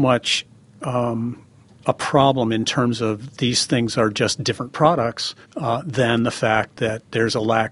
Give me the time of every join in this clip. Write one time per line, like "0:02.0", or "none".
0:01.6
0:05.4